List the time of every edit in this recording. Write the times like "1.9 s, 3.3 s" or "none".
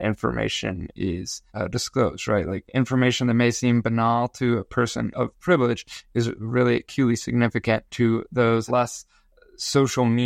1.5 s, 7.9 s, 8.7 s